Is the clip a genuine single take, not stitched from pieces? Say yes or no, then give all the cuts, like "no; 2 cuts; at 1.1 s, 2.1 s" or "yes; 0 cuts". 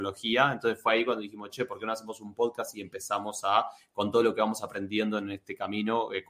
yes; 0 cuts